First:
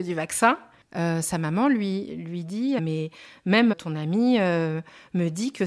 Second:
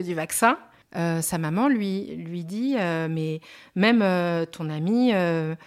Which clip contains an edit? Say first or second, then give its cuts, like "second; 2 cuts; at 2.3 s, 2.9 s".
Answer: first; 2 cuts; at 2.8 s, 3.7 s